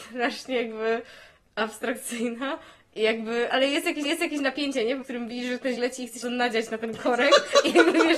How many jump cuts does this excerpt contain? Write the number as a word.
five